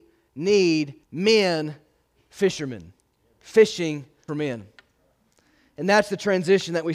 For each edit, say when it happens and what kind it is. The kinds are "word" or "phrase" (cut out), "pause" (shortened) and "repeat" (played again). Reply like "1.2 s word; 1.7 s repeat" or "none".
1.0 s pause; 4.3 s word